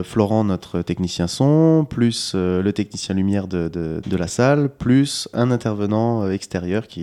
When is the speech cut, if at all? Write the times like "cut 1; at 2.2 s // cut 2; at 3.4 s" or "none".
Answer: cut 1; at 4.0 s